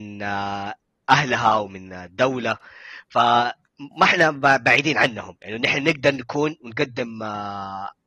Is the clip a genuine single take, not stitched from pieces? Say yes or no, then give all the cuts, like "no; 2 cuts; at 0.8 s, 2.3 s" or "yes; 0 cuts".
no; 1 cut; at 3.9 s